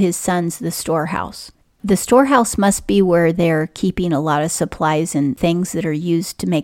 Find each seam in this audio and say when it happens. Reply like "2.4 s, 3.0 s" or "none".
none